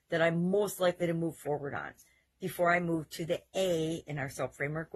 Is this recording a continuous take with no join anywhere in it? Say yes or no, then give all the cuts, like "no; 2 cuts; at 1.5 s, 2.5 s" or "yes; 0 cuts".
yes; 0 cuts